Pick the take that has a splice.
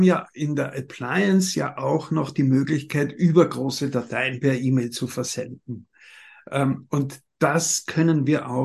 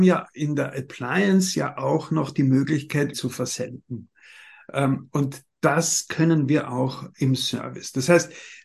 second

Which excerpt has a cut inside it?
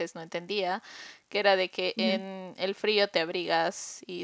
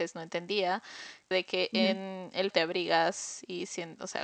second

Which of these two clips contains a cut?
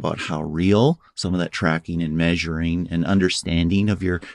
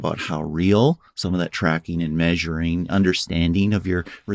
second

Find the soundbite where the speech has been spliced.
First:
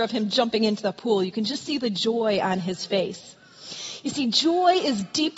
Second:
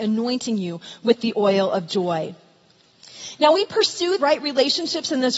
second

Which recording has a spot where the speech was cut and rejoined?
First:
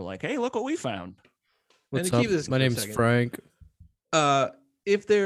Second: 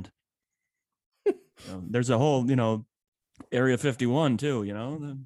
first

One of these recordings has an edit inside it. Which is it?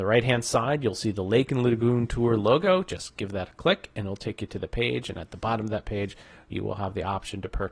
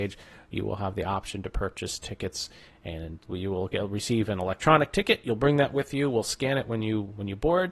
second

